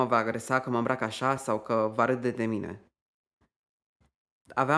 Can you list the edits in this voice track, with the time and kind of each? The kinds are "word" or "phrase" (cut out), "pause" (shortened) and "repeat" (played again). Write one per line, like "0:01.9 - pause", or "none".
none